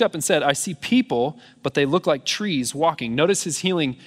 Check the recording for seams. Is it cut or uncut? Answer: uncut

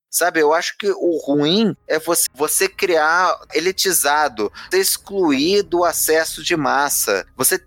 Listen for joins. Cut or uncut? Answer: cut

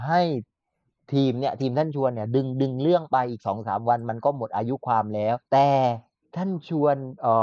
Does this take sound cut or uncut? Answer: cut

